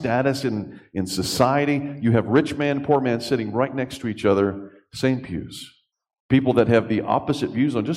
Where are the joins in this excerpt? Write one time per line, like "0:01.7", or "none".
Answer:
0:05.9

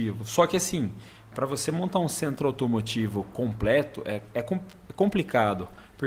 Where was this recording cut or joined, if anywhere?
none

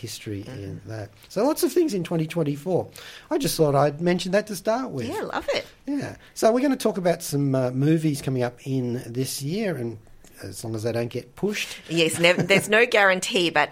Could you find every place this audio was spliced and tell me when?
none

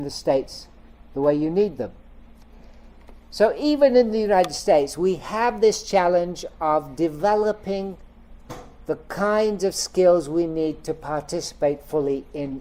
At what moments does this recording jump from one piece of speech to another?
0:03.2

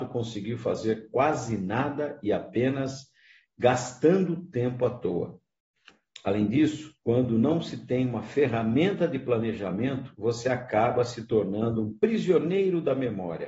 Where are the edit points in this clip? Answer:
0:07.0

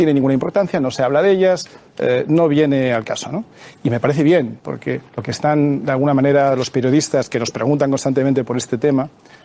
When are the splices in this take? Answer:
0:05.1

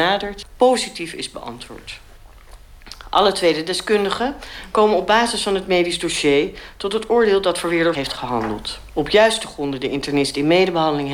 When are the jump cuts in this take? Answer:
0:07.9

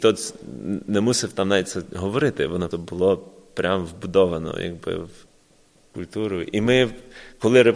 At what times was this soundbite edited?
0:02.7

